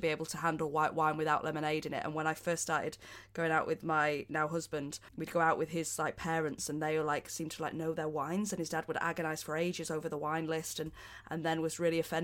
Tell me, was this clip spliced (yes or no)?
yes